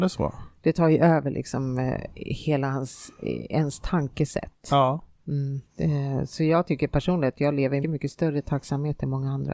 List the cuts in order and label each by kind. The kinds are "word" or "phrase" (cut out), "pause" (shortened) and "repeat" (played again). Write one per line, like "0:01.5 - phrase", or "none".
0:05.7 - pause
0:07.8 - word

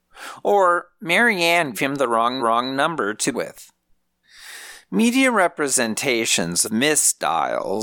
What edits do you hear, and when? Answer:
0:01.7 - word
0:02.4 - repeat
0:03.3 - word
0:06.6 - word

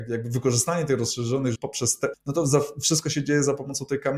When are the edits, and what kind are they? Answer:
0:01.5 - word
0:02.1 - word

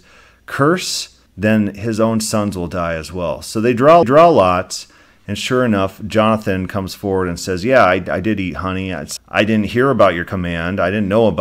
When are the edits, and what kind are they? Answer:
0:01.3 - pause
0:04.0 - repeat
0:09.2 - word

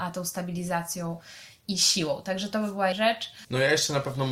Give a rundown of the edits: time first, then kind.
0:02.9 - word

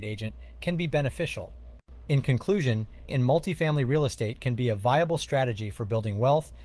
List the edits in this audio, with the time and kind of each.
0:03.1 - word

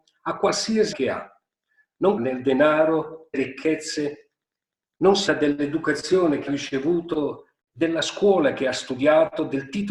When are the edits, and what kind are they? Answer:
0:00.9 - word
0:02.2 - word
0:03.3 - word
0:05.3 - word
0:06.5 - word

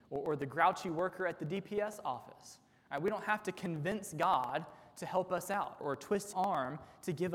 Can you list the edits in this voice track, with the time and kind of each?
0:05.8 - word
0:06.3 - word

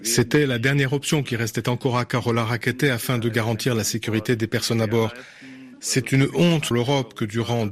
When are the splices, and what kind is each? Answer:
0:06.7 - word

